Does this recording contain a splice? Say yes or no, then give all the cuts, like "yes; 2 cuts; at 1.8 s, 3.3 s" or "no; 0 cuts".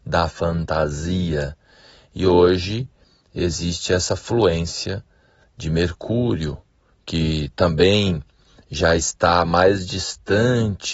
no; 0 cuts